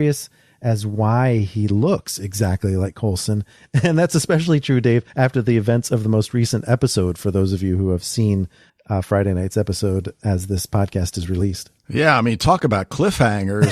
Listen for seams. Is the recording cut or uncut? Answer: cut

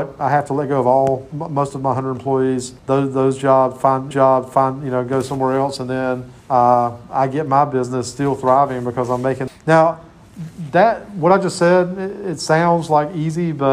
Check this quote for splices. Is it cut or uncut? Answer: cut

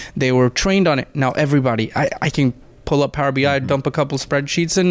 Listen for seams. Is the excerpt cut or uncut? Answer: uncut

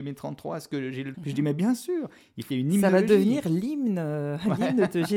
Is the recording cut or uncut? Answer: cut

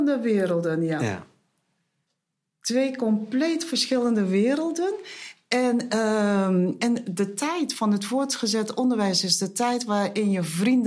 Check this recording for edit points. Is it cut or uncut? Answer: uncut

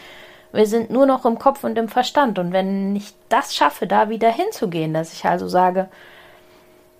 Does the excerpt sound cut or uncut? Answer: uncut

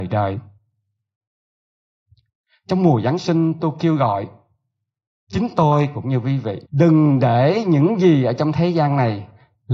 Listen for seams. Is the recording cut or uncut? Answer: cut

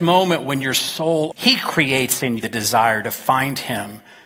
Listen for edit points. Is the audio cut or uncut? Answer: cut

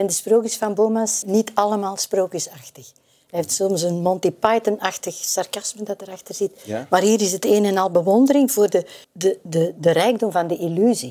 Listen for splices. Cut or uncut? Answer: cut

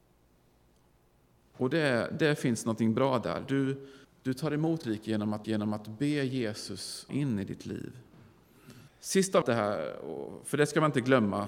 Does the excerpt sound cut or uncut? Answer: cut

